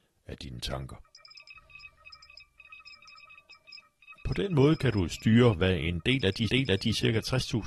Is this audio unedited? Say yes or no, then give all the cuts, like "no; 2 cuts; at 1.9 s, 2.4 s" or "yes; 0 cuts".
no; 1 cut; at 6.5 s